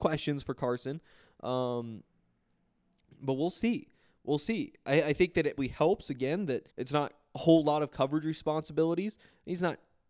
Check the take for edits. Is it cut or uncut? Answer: cut